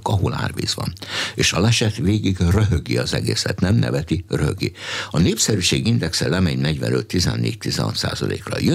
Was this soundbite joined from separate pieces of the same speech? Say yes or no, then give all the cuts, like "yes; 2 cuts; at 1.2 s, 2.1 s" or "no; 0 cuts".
no; 0 cuts